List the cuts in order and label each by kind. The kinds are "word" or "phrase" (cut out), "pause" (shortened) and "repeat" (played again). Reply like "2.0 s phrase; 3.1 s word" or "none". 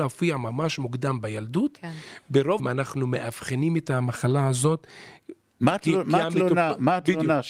2.6 s word